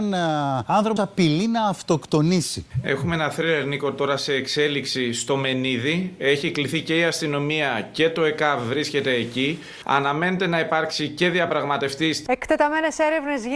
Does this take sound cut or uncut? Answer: cut